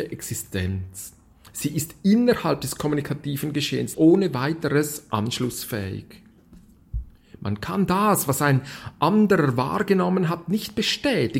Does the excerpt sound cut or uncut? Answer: cut